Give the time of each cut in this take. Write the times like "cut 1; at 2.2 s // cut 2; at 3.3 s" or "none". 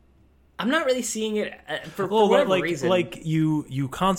none